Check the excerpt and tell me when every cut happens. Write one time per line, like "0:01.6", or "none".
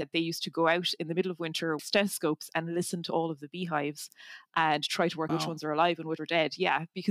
0:01.8
0:05.3
0:06.2